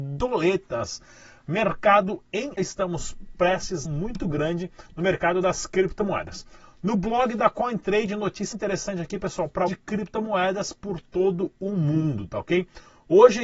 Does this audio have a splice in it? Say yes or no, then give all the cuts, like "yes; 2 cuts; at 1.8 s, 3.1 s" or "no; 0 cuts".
yes; 5 cuts; at 2.6 s, 3.8 s, 4.9 s, 8.5 s, 9.7 s